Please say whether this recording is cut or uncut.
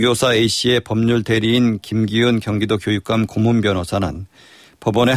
uncut